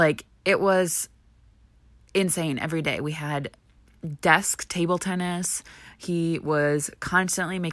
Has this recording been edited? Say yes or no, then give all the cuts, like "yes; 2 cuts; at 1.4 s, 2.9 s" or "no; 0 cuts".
no; 0 cuts